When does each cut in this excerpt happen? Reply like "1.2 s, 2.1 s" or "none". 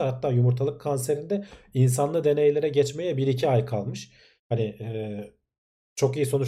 none